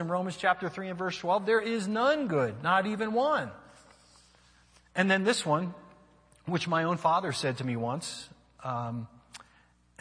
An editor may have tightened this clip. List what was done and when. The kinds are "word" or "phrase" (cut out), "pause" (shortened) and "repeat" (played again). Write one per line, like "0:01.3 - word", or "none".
none